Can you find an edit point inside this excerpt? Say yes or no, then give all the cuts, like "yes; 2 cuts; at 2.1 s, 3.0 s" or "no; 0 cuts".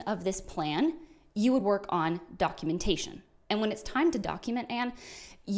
no; 0 cuts